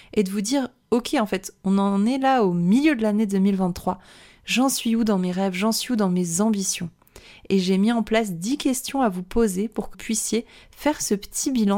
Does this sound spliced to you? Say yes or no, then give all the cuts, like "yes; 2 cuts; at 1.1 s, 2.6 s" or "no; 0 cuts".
yes; 1 cut; at 9.9 s